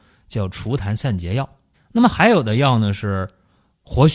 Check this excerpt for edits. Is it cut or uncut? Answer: cut